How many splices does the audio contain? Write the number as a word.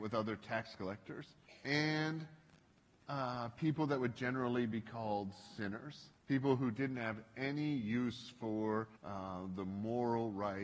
three